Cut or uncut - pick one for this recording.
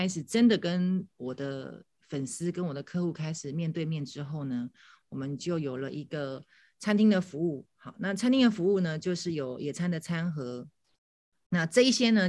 uncut